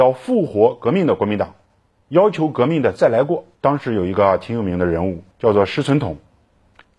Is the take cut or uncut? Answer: cut